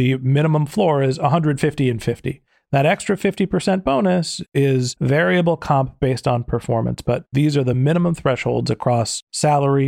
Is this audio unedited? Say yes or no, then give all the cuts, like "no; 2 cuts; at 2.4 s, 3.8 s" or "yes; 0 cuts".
yes; 0 cuts